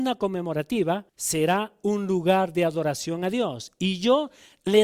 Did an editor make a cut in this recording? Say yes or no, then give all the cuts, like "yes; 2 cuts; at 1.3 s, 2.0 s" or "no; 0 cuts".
yes; 1 cut; at 1.1 s